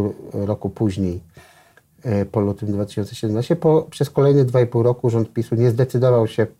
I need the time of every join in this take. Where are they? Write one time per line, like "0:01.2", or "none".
none